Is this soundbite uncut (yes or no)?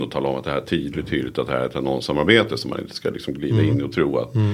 yes